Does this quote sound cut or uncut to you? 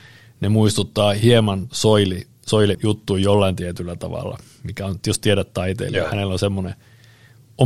cut